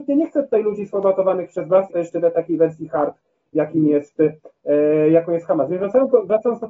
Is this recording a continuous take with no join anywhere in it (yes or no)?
no